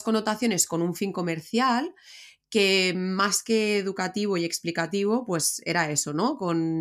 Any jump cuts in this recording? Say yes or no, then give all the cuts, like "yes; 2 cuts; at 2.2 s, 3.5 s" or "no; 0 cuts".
no; 0 cuts